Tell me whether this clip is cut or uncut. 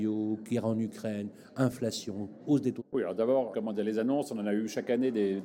cut